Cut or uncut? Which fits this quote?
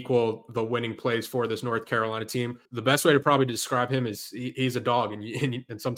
cut